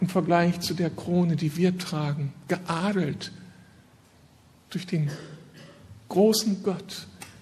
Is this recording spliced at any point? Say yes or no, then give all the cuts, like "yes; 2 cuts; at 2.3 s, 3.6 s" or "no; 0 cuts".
no; 0 cuts